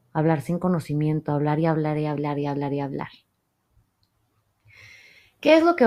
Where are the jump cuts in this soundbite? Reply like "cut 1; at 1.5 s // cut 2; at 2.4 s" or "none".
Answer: none